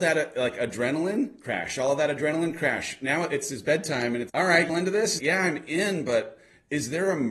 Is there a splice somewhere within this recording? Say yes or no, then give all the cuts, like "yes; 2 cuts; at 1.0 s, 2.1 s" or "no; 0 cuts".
yes; 3 cuts; at 4.3 s, 4.7 s, 5.2 s